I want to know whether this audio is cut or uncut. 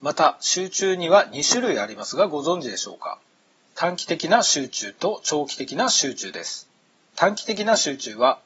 uncut